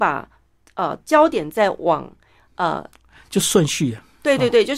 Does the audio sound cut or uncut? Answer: uncut